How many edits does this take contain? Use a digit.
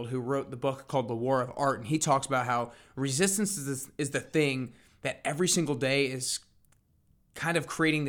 0